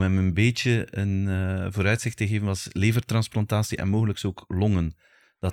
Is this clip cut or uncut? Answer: uncut